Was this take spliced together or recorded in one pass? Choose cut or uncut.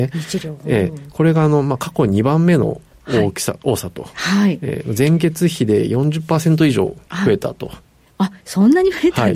uncut